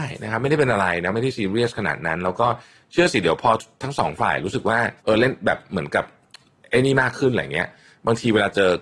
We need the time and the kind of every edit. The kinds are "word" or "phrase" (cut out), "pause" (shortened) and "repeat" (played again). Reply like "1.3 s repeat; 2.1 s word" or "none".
5.0 s pause